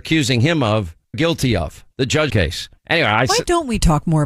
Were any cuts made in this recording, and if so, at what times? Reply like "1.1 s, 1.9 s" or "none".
1.1 s, 1.9 s, 2.3 s, 2.8 s